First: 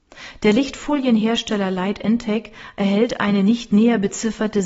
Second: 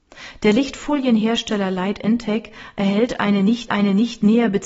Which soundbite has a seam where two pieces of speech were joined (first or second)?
second